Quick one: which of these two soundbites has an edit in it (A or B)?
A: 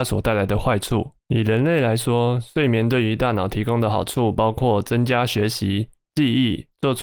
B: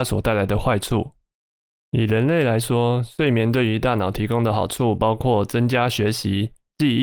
A